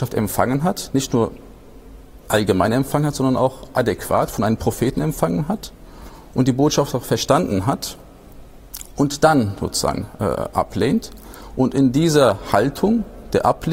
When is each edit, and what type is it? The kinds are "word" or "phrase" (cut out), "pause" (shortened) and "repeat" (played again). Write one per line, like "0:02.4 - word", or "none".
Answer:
0:02.2 - word